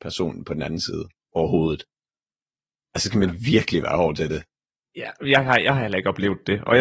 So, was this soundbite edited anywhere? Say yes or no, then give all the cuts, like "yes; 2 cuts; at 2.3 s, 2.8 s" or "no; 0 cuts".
no; 0 cuts